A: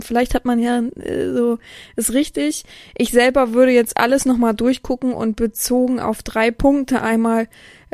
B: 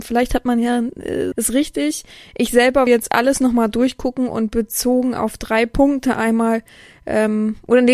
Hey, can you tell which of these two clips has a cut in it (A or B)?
B